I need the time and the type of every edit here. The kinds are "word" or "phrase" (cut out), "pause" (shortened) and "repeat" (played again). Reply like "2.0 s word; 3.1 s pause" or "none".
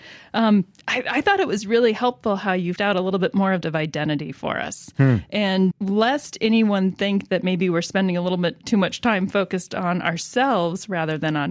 2.8 s word; 3.6 s phrase; 5.7 s word